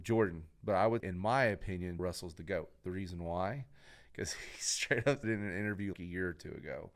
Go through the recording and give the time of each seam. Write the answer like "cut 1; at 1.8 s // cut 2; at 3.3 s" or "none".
cut 1; at 1.0 s // cut 2; at 2.0 s // cut 3; at 5.2 s // cut 4; at 5.9 s